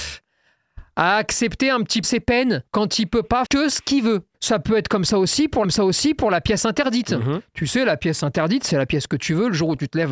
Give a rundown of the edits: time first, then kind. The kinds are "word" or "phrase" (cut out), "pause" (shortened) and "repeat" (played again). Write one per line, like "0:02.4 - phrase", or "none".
0:02.0 - word
0:02.7 - pause
0:03.5 - word
0:04.3 - pause
0:05.6 - repeat